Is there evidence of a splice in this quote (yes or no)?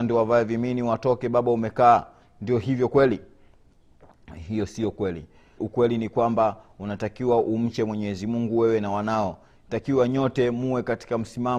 yes